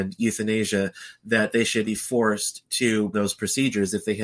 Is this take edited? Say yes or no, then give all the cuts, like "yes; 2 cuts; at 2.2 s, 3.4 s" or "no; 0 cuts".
yes; 2 cuts; at 1.8 s, 3.1 s